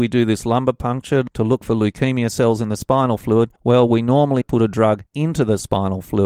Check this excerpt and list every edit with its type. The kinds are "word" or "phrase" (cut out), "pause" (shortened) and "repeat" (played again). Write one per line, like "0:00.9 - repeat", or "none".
0:03.6 - pause
0:04.4 - word
0:05.1 - pause

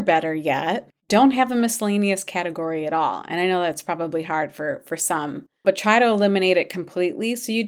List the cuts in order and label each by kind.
0:05.6 - pause

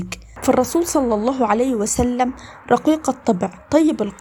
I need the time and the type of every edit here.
none

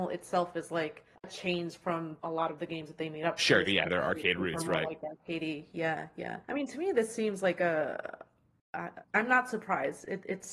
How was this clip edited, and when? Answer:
0:01.1 - pause
0:02.2 - pause
0:06.4 - pause
0:09.0 - pause

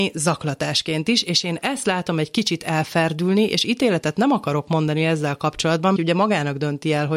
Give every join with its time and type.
0:06.0 - phrase

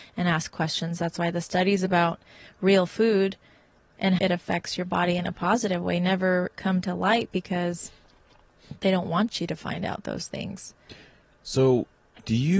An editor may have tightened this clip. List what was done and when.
0:04.2 - word

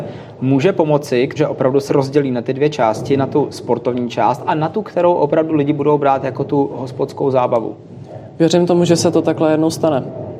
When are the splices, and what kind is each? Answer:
0:01.4 - word
0:01.9 - word

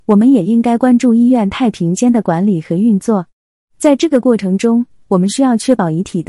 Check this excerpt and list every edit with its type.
none

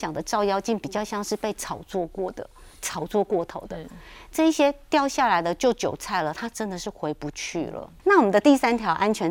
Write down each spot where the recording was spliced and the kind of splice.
none

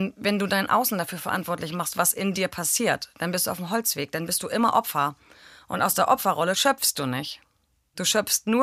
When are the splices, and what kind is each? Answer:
none

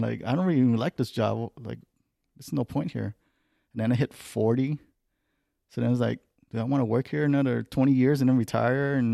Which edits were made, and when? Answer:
none

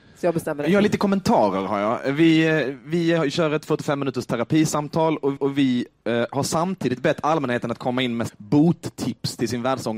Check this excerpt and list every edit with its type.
0:05.4 - repeat
0:08.3 - phrase

